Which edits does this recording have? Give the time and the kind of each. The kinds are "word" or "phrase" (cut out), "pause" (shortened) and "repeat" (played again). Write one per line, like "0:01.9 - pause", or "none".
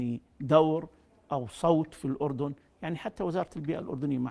none